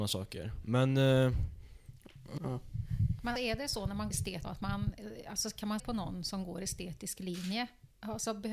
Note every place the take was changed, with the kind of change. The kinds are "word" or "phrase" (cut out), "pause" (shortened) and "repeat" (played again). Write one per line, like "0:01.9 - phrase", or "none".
0:02.4 - word
0:03.4 - word
0:04.1 - word
0:04.4 - word
0:05.8 - word